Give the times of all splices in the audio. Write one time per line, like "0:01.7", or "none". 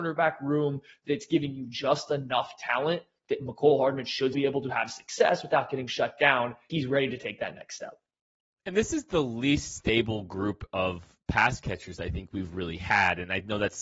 0:04.3
0:06.7